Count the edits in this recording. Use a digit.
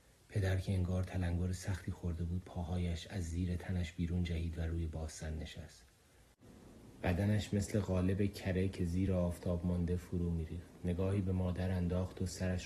0